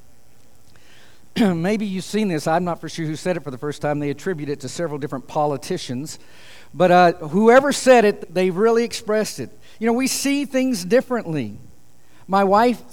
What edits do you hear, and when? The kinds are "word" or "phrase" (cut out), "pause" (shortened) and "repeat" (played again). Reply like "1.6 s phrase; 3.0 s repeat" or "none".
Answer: 8.2 s word